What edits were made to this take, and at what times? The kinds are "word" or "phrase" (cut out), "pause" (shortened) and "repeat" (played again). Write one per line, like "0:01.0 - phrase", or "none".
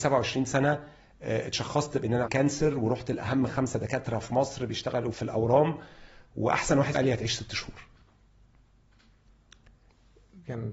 0:02.3 - word
0:05.1 - word
0:06.9 - word